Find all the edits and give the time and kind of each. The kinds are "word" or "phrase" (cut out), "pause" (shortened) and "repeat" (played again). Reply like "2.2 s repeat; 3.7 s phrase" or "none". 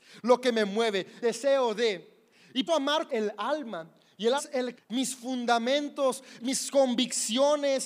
1.2 s word; 2.7 s word; 3.1 s word; 4.4 s word; 4.8 s word; 6.4 s word